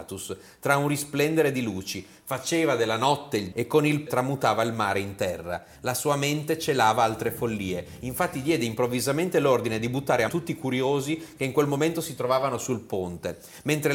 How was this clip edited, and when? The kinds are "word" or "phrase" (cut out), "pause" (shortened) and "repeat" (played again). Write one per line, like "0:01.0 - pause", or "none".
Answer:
0:03.5 - word
0:04.1 - word
0:10.3 - word